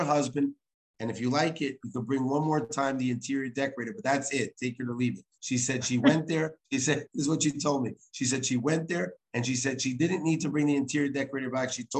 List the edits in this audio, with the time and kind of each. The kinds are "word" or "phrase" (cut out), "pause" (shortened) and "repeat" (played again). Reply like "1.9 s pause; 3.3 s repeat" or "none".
5.3 s pause; 6.6 s pause